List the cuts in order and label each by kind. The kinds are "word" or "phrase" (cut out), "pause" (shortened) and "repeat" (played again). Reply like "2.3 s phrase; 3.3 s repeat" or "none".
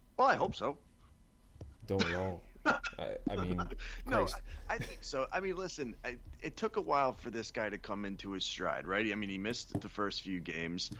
1.8 s pause